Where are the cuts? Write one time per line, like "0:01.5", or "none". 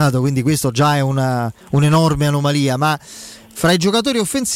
0:01.6